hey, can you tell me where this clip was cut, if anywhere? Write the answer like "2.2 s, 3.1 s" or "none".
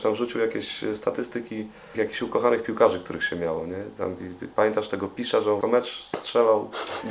1.9 s, 5.6 s